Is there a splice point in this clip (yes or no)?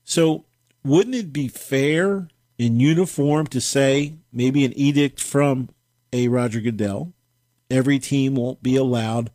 no